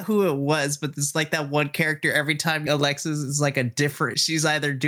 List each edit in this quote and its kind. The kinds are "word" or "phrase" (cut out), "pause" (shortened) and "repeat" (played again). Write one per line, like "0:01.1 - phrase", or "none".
none

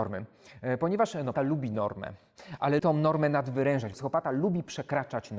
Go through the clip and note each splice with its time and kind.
0:01.3 - word
0:02.8 - word
0:03.9 - word

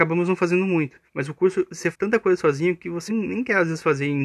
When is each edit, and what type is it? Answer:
0:01.1 - pause
0:01.9 - word
0:03.1 - word

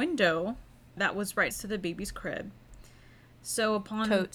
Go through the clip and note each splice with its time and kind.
0:01.0 - word
0:01.5 - word

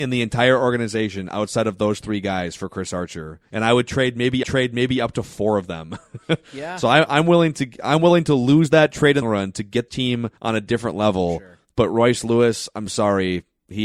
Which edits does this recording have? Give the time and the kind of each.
0:03.5 - pause
0:04.4 - repeat
0:09.2 - phrase
0:09.9 - word
0:10.4 - pause

